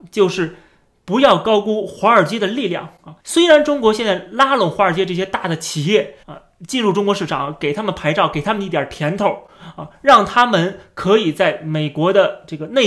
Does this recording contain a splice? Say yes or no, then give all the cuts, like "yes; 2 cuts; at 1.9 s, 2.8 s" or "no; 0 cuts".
yes; 2 cuts; at 3.2 s, 6.2 s